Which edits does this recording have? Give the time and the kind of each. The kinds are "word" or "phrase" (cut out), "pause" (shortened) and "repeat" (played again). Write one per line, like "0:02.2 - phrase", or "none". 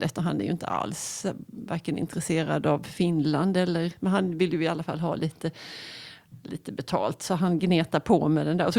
none

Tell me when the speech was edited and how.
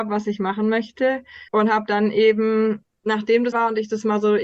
0:01.5 - pause
0:03.5 - phrase

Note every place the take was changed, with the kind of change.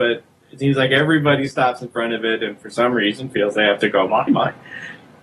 0:04.3 - word

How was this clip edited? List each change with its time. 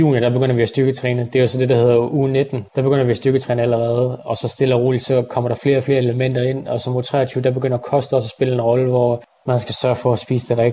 0:02.7 - pause

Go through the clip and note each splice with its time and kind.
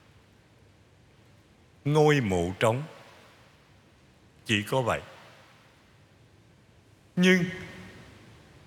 none

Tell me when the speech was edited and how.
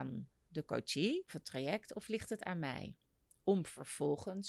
0:01.3 - word

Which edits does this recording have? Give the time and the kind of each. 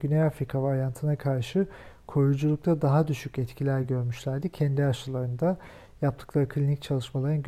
none

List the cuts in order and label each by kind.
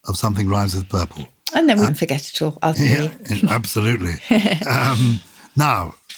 0:01.9 - word
0:02.7 - word

